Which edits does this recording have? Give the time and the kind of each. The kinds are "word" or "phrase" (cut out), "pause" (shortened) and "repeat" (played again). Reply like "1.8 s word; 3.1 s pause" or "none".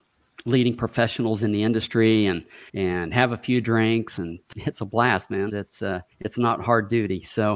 2.7 s pause; 5.5 s word; 6.1 s pause